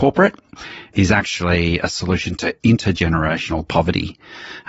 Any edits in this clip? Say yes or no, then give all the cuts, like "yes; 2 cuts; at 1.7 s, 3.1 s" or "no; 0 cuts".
yes; 1 cut; at 0.9 s